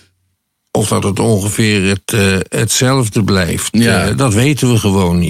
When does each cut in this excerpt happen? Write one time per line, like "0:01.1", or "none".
none